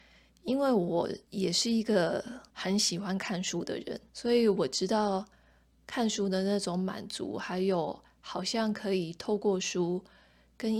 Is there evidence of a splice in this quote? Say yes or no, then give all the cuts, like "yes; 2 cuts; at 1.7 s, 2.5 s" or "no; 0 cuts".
yes; 3 cuts; at 1.2 s, 2.5 s, 4.1 s